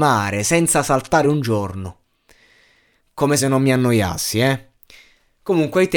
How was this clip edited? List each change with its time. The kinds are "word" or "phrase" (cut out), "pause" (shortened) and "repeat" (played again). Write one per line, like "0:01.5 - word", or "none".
none